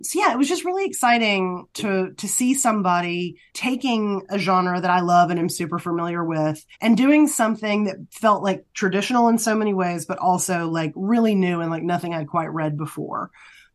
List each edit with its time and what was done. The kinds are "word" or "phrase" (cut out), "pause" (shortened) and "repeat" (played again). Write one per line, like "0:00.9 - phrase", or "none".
0:01.7 - pause
0:03.5 - pause
0:06.7 - pause

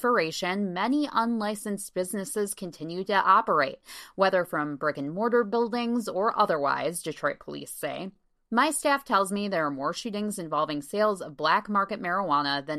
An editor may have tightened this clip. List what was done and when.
none

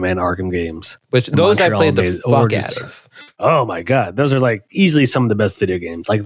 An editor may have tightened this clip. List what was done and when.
0:01.0 - pause

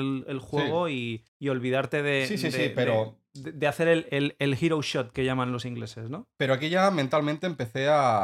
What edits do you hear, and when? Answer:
0:01.3 - pause

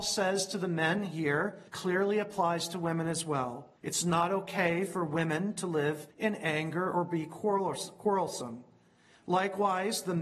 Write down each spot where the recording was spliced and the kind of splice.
0:01.7 - pause
0:03.8 - pause
0:06.1 - pause

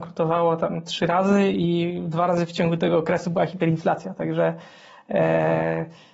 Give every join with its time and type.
none

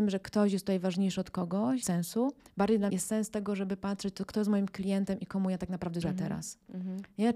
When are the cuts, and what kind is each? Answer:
0:01.8 - phrase
0:02.4 - pause
0:02.9 - word
0:06.0 - word

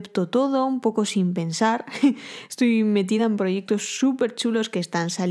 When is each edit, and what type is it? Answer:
none

